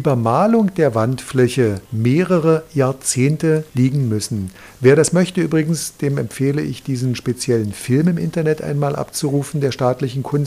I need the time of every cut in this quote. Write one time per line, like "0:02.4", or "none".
0:01.9
0:03.7